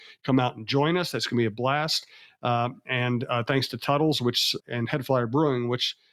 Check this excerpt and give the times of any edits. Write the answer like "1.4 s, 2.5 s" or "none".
4.6 s